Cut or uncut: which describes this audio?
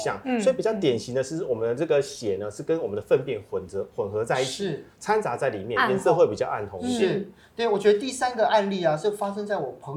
uncut